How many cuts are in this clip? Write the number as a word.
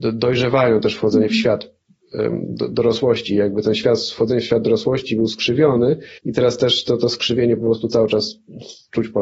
one